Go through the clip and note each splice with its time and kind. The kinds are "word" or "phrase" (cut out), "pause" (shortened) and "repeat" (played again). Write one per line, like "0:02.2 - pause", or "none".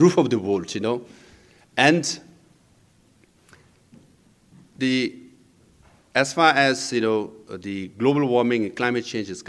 none